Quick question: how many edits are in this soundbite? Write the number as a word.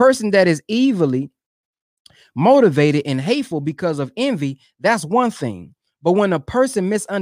zero